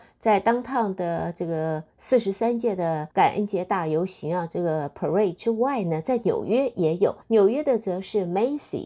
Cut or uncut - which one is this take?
cut